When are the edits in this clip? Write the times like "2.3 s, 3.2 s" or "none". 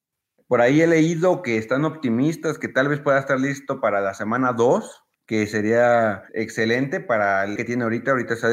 5.1 s, 6.3 s, 7.6 s

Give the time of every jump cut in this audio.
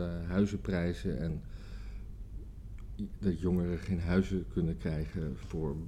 none

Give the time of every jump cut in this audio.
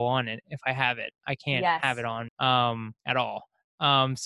2.3 s, 3.0 s

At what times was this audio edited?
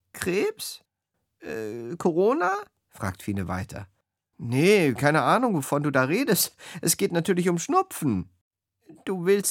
none

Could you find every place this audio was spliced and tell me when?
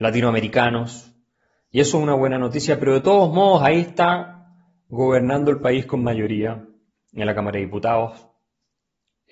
none

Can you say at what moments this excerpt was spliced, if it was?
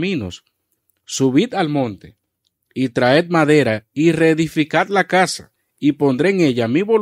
none

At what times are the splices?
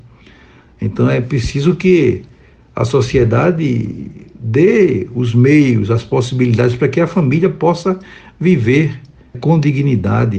9.3 s

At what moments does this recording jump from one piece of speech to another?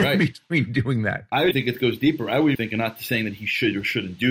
1.5 s, 2.5 s

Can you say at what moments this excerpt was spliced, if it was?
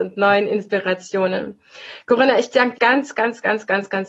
2.7 s

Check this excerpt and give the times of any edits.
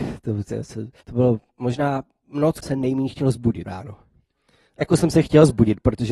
1.0 s, 2.6 s, 3.7 s, 4.8 s

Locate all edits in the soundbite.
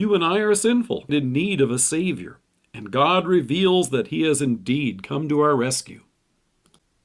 1.1 s

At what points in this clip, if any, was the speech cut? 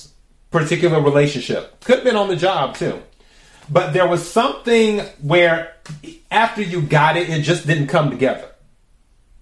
none

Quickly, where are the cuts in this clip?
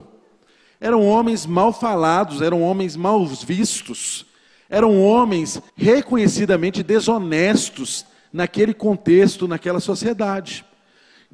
5.7 s

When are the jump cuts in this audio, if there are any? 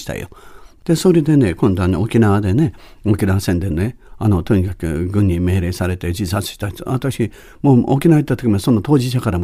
none

